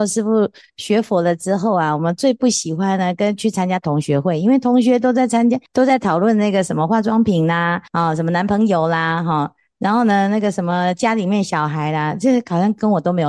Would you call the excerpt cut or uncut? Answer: cut